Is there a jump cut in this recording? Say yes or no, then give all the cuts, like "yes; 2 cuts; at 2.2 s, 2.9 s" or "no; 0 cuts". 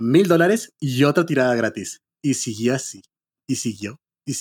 no; 0 cuts